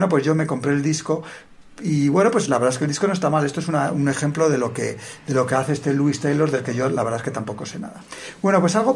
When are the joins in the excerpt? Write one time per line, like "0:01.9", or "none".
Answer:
none